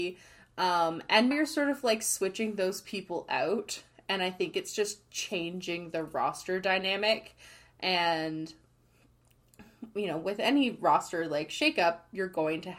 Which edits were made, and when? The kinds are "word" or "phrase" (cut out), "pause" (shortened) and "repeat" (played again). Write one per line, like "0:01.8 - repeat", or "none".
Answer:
0:01.3 - word